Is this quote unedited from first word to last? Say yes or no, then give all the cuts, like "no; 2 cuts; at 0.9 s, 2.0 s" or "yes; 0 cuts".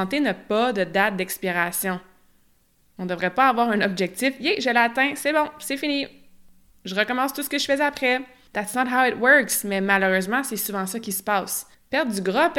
yes; 0 cuts